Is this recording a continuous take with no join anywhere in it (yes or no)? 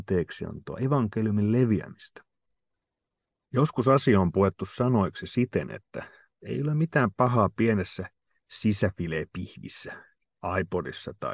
yes